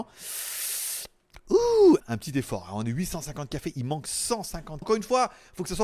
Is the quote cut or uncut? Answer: cut